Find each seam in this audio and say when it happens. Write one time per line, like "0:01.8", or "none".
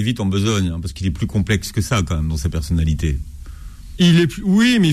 none